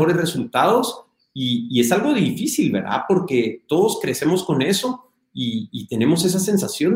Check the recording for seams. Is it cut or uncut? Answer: uncut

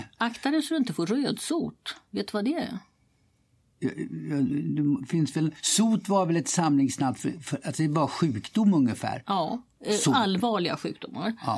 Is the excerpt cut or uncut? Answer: uncut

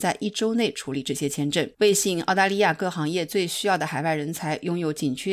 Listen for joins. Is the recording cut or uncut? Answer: cut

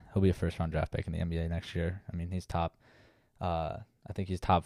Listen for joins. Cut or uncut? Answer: uncut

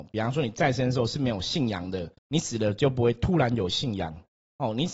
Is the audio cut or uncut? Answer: cut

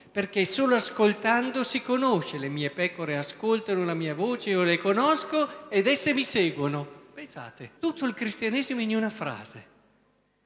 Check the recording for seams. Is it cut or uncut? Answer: cut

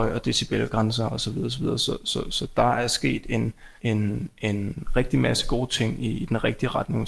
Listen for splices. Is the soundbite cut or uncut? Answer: cut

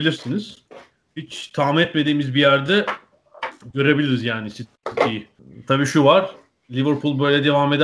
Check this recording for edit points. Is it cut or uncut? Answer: uncut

